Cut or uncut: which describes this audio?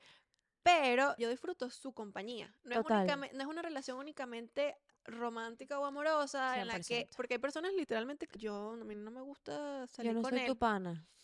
cut